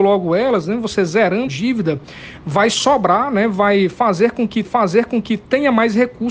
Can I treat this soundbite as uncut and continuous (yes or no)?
no